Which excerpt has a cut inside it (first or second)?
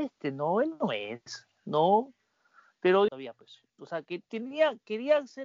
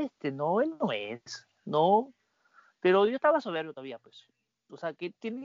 first